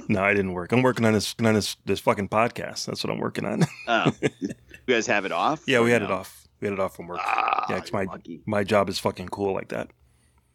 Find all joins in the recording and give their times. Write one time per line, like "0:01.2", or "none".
0:01.4
0:04.9